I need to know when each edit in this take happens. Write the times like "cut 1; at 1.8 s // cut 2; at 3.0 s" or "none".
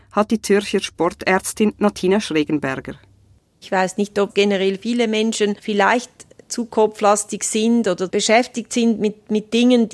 cut 1; at 8.1 s